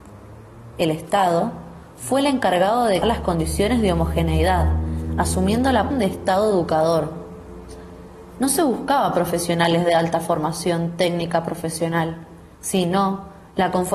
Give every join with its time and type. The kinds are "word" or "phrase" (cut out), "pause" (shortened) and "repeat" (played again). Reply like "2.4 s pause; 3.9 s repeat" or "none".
3.0 s word; 5.9 s word; 12.5 s pause